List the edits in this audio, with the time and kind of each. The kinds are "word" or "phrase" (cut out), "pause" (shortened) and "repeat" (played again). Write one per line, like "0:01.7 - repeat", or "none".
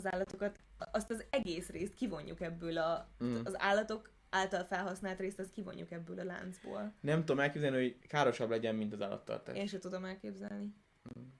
0:08.0 - pause